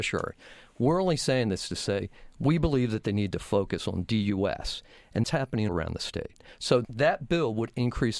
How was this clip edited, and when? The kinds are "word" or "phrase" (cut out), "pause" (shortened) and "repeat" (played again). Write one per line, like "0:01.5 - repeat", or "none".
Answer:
0:05.2 - word
0:05.7 - word
0:06.8 - word